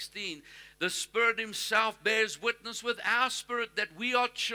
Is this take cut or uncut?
uncut